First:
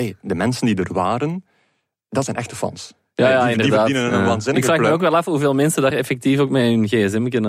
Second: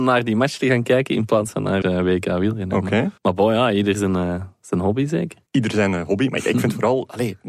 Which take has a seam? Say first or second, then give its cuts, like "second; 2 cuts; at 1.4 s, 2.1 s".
second; 3 cuts; at 1.8 s, 3.2 s, 5.5 s